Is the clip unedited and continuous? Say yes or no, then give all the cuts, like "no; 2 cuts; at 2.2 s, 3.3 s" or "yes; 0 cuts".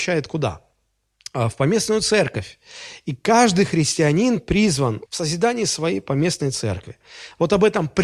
no; 1 cut; at 5.0 s